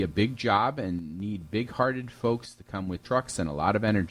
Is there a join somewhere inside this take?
yes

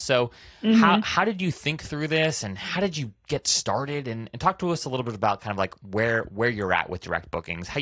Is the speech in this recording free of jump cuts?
yes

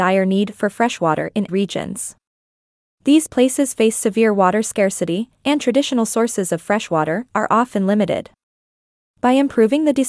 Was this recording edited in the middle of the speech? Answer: yes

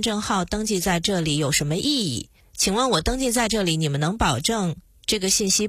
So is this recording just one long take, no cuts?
yes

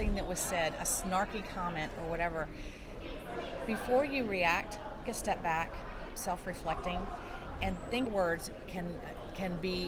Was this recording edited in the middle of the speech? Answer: yes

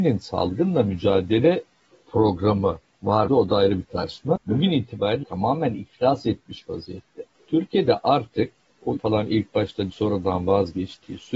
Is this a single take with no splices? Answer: no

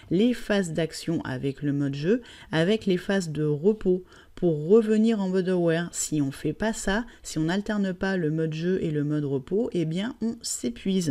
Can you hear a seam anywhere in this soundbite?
no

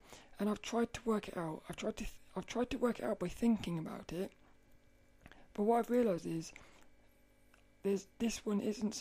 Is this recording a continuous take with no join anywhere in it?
yes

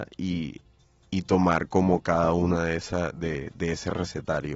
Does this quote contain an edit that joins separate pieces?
no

